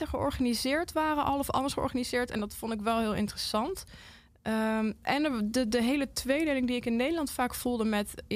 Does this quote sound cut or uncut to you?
uncut